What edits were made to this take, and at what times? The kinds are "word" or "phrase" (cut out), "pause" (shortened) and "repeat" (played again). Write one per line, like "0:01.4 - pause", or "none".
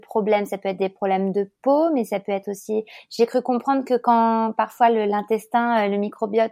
none

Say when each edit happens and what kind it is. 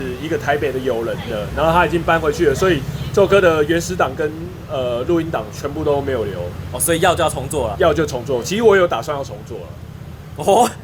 0:07.7 - word

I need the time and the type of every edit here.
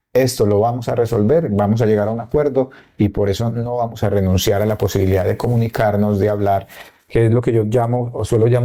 none

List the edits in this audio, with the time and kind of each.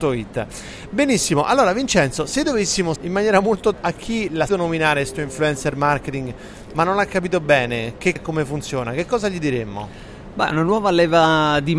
0:03.0 - word
0:03.7 - word
0:04.5 - word
0:08.2 - word

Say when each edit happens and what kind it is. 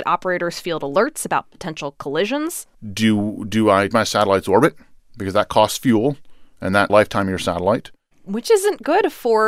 0:03.9 - word
0:06.9 - phrase

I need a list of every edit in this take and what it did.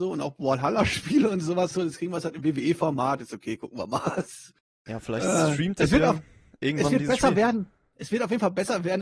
0:01.7 - word

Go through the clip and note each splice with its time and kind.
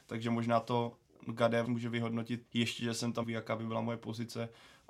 0:01.6 - word
0:02.5 - word
0:03.2 - phrase

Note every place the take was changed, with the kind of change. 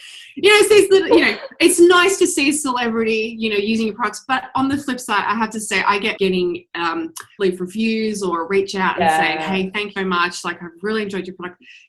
0:06.2 - phrase
0:07.4 - phrase
0:10.0 - word

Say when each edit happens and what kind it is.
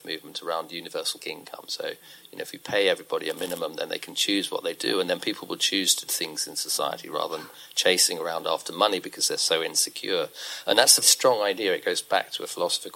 0:01.2 - word
0:06.1 - phrase
0:11.0 - word

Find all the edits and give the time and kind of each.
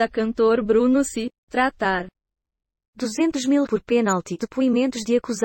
0:03.7 - word
0:04.4 - word

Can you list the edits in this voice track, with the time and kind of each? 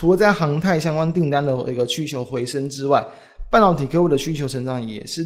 none

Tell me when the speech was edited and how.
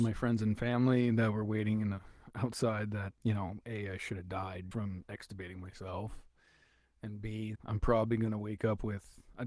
0:03.2 - word
0:04.7 - word
0:07.6 - word

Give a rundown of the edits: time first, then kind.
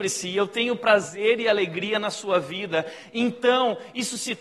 none

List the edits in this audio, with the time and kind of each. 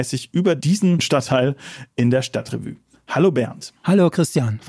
none

